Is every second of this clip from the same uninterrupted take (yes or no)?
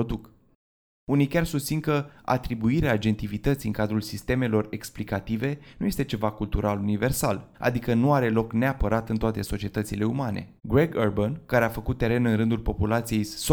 no